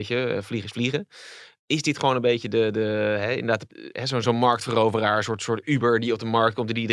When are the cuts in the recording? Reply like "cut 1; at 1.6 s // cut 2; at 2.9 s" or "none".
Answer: none